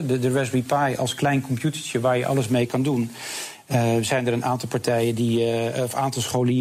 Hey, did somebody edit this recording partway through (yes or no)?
no